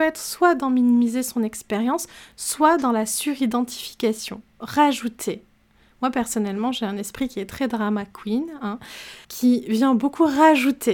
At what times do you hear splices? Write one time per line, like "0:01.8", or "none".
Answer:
0:04.5
0:09.2